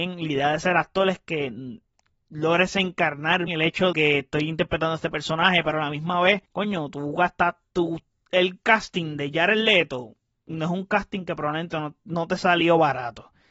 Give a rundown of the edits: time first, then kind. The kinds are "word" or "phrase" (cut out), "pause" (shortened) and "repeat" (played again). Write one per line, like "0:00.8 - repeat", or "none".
0:01.9 - pause
0:03.5 - word
0:03.9 - word
0:06.5 - pause